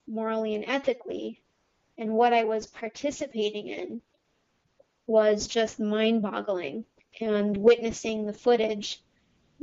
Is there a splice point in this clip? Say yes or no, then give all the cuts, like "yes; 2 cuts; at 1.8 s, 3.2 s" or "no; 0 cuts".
no; 0 cuts